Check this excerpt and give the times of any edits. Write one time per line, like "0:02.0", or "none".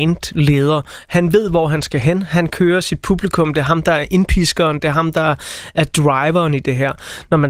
none